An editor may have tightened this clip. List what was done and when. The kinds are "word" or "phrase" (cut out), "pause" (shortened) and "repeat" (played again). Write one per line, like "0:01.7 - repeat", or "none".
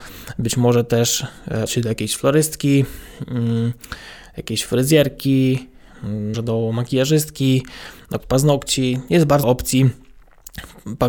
0:01.7 - word
0:06.3 - word
0:08.2 - word
0:09.4 - word